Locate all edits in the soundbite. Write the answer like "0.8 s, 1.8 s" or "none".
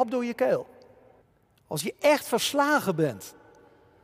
1.2 s